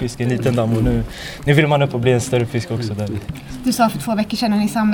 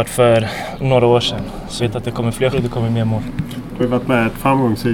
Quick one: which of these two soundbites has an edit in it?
second; 3 cuts; at 1.8 s, 2.5 s, 3.8 s

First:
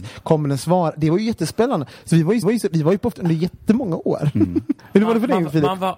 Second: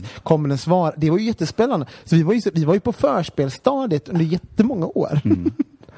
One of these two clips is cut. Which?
first; 3 cuts; at 2.4 s, 3.1 s, 4.8 s

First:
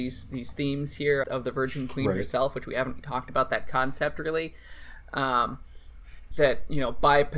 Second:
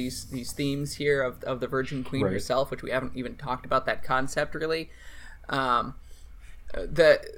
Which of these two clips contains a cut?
first; 3 cuts; at 1.2 s, 3.0 s, 6.3 s

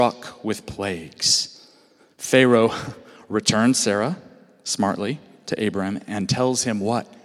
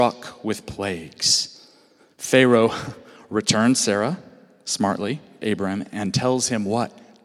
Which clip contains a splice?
second; 1 cut; at 5.4 s

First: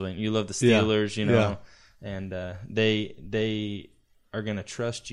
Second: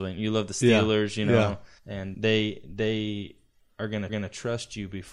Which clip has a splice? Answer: second; 3 cuts; at 1.8 s, 2.1 s, 4.1 s

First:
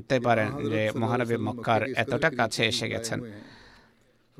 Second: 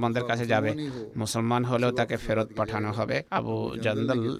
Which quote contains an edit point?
second; 1 cut; at 3.3 s

